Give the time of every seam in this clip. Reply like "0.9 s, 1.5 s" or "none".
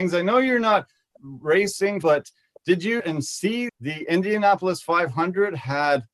1.2 s, 2.0 s, 3.0 s, 3.7 s

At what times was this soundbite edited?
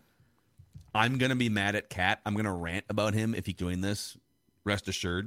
3.5 s

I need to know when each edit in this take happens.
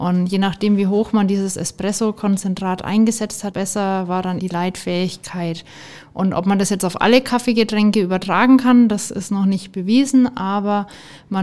3.5 s, 4.4 s

